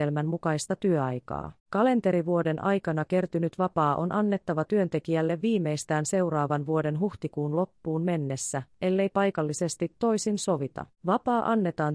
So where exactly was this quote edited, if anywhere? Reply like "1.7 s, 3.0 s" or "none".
1.6 s, 10.9 s